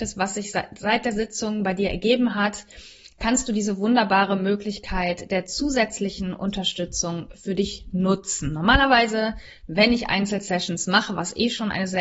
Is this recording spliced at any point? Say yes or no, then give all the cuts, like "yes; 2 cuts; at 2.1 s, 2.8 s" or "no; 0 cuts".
no; 0 cuts